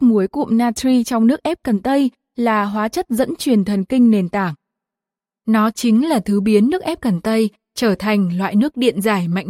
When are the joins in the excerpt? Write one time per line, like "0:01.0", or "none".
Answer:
none